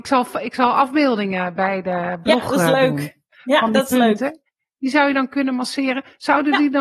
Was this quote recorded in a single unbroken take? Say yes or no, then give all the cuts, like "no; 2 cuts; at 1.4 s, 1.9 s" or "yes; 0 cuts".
yes; 0 cuts